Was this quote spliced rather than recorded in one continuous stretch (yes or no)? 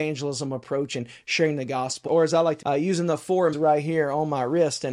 yes